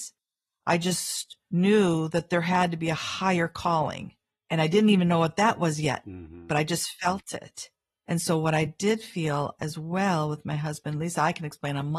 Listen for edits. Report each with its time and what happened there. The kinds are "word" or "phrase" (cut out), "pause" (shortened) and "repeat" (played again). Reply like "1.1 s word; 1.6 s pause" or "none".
none